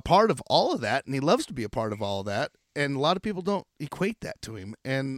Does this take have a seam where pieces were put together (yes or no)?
no